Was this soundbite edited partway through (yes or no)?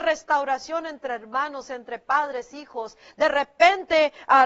no